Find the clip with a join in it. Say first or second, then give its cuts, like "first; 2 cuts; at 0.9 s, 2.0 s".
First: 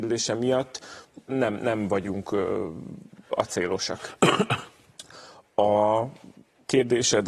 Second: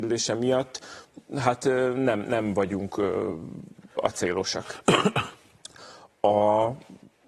first; 1 cut; at 1.3 s